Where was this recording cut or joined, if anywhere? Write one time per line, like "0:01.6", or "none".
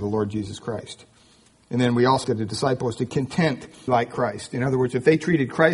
0:02.2
0:03.9